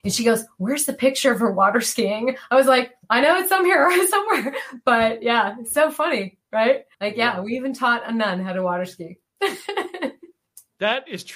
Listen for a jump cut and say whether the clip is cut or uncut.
cut